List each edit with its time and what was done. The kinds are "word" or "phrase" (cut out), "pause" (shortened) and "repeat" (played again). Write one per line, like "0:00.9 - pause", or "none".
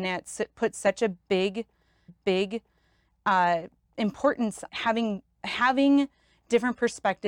0:02.1 - repeat
0:04.7 - word